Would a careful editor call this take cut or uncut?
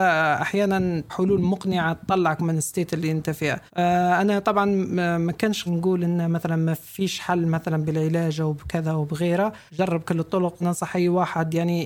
cut